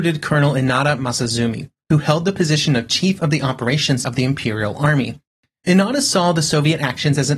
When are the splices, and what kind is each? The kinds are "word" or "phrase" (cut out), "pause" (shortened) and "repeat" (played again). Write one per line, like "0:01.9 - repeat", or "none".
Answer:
0:04.0 - word